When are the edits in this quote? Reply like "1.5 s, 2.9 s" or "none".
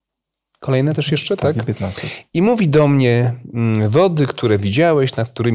none